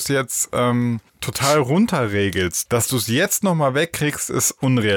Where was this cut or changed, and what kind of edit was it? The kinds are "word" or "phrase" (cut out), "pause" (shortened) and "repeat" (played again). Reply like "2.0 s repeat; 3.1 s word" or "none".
1.1 s pause; 2.7 s word